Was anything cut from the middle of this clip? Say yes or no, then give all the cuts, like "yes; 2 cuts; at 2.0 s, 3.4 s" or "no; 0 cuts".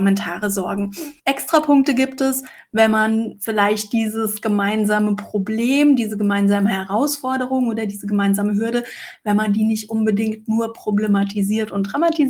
yes; 1 cut; at 1.2 s